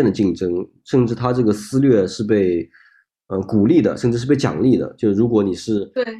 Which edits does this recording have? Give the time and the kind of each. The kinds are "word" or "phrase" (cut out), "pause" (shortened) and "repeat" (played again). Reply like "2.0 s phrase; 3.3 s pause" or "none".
none

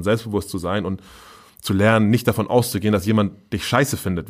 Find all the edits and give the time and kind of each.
none

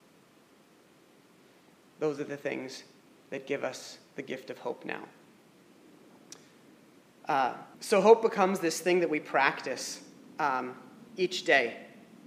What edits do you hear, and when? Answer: 3.1 s pause; 7.7 s pause; 11.1 s pause

